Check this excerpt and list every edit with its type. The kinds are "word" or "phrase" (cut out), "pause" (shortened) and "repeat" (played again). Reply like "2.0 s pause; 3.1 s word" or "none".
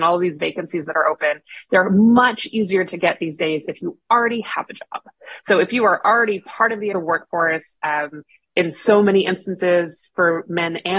6.9 s phrase